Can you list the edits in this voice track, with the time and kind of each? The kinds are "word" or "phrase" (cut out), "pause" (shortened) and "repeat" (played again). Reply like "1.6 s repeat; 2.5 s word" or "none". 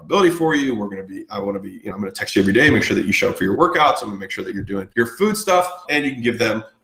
4.9 s pause; 5.8 s word